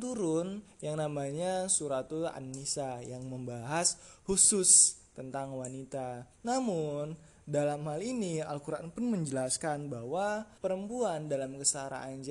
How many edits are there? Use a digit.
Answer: 2